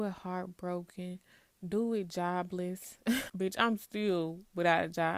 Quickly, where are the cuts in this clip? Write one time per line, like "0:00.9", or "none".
0:03.3